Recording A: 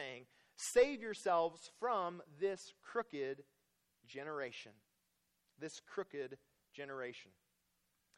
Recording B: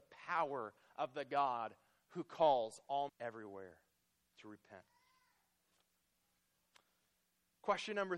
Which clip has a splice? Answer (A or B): B